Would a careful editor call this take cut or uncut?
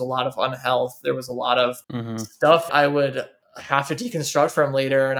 cut